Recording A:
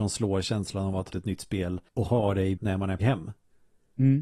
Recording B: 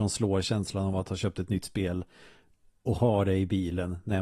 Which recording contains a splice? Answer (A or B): A